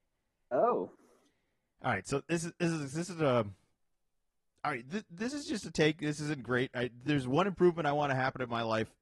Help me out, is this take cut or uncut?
uncut